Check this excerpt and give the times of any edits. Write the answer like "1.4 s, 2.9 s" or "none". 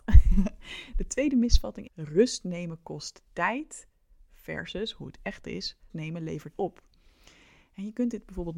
1.9 s, 5.9 s, 6.5 s